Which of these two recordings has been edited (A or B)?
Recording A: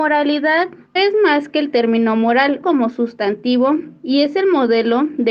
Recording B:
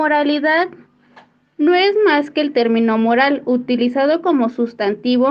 A